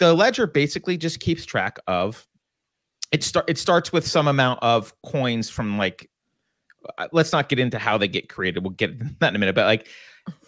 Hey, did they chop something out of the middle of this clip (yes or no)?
no